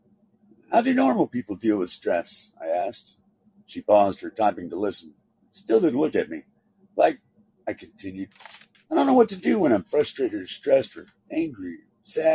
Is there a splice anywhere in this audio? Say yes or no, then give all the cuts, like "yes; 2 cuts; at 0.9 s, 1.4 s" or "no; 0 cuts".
no; 0 cuts